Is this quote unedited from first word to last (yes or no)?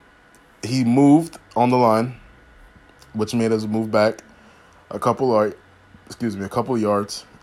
yes